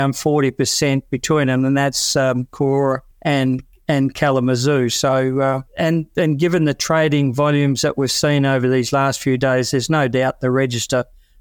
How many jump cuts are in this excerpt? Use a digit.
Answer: 2